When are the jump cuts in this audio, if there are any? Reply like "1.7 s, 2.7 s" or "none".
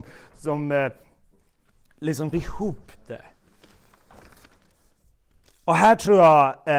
2.3 s